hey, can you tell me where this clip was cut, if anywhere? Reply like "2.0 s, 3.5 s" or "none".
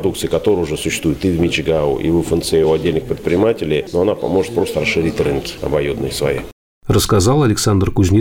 none